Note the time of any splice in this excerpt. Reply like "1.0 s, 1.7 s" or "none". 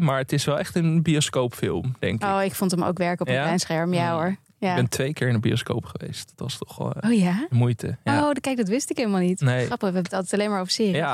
6.8 s